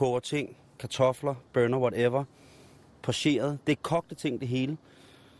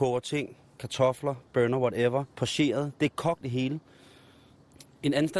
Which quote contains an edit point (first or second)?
second